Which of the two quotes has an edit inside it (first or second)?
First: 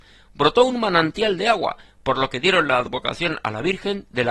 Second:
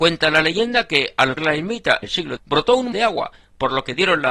second